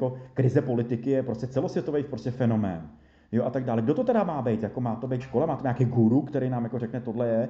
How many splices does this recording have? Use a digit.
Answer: 1